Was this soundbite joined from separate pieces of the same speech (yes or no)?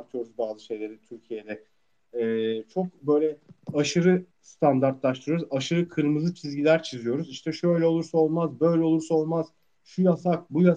yes